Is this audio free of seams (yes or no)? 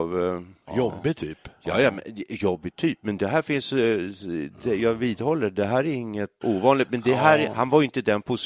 no